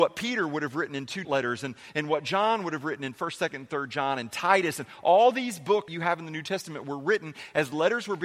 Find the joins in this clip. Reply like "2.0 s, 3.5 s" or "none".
1.2 s, 5.9 s